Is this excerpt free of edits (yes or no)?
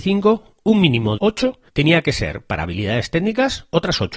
no